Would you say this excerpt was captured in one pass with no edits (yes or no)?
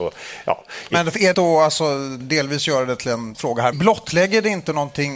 no